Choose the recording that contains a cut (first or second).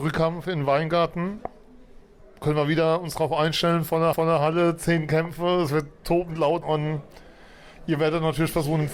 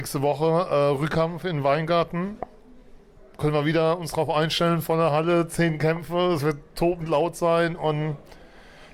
first